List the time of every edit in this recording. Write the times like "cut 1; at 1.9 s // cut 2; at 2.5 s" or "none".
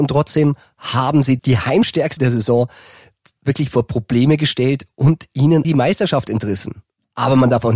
cut 1; at 1.4 s // cut 2; at 2.2 s // cut 3; at 5.6 s